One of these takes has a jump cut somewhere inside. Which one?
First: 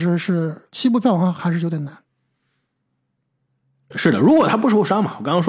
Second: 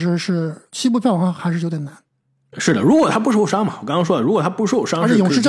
second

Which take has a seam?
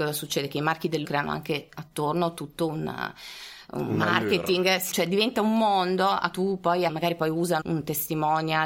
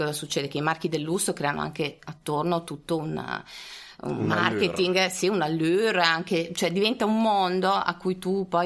first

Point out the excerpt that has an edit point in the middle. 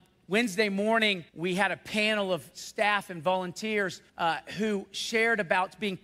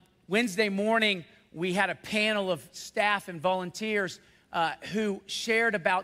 first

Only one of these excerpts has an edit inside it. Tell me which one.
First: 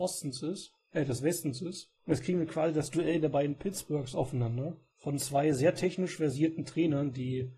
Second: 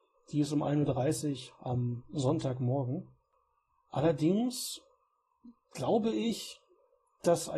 first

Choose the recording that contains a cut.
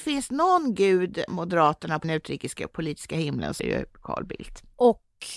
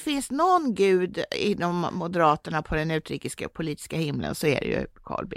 first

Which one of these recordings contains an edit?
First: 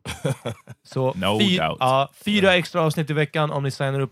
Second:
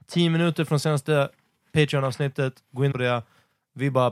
second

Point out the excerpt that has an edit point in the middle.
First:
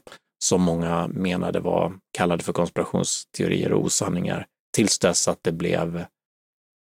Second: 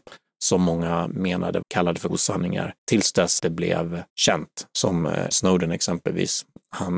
second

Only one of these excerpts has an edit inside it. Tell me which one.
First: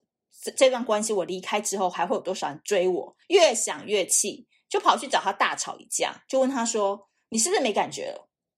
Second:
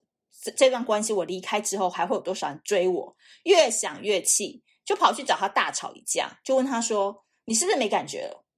first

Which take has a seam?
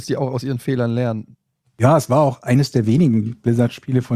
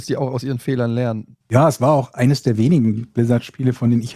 second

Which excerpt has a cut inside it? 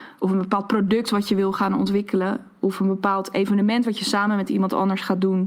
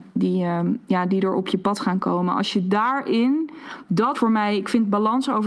second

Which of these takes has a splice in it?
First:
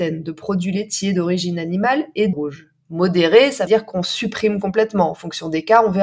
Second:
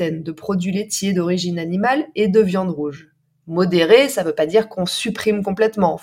first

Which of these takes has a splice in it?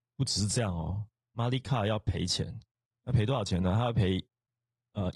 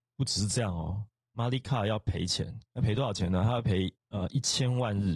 second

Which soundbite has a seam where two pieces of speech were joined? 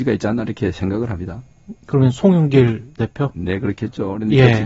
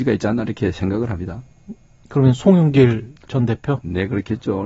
first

